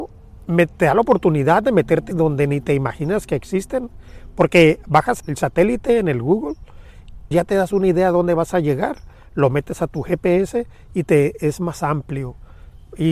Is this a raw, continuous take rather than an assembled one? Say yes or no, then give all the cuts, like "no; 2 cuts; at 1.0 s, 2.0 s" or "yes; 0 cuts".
no; 3 cuts; at 2.1 s, 5.2 s, 7.3 s